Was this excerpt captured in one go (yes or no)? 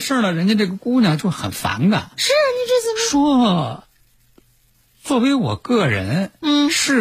yes